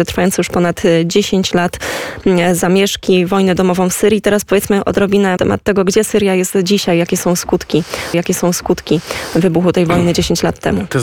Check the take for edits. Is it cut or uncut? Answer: cut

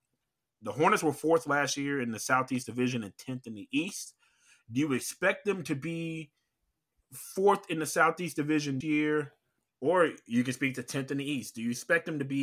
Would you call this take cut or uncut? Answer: cut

